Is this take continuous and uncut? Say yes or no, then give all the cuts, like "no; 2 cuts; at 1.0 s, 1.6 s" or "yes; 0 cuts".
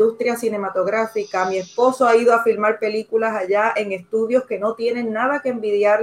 yes; 0 cuts